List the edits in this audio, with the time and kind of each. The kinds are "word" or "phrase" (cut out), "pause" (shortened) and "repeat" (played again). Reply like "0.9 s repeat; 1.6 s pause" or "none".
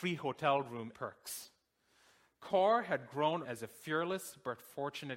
0.9 s word; 3.4 s word